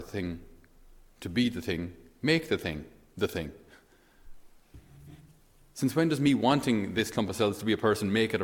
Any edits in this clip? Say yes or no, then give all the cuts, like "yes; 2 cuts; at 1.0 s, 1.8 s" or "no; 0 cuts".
no; 0 cuts